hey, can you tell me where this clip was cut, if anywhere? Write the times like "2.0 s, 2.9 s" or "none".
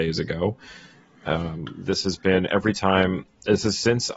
none